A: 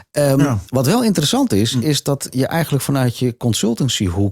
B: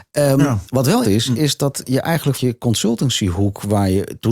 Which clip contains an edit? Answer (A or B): B